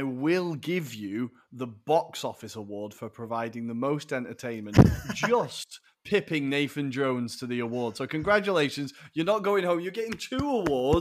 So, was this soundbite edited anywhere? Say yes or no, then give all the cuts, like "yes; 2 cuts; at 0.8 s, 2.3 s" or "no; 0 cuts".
no; 0 cuts